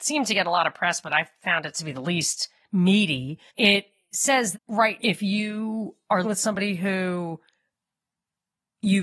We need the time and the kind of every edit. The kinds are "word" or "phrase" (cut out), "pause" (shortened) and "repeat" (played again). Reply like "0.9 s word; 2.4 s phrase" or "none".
3.5 s pause; 4.5 s word; 5.0 s word; 6.2 s word